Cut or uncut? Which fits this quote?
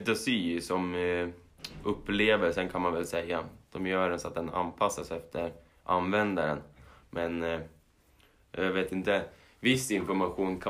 uncut